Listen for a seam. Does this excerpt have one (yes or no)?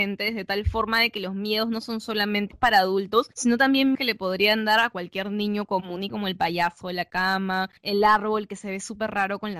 yes